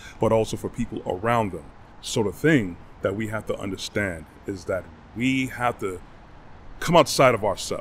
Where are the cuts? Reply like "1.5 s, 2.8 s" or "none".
1.9 s